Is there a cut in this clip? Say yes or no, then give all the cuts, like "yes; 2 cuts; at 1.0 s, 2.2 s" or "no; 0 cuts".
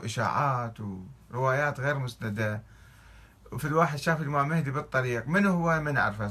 no; 0 cuts